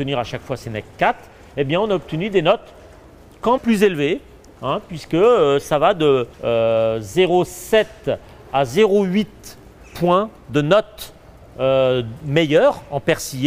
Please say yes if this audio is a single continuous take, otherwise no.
no